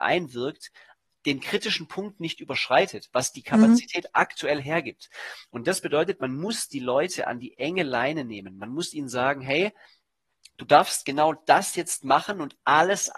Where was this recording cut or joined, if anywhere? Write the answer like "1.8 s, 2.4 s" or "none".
none